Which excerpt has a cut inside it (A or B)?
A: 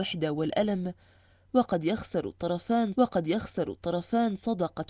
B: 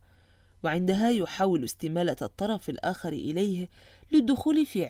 A